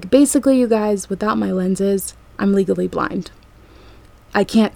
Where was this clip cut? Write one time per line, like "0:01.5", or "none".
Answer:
none